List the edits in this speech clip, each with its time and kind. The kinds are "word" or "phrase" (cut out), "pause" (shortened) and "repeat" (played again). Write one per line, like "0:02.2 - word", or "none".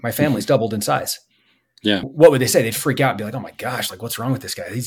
0:02.0 - word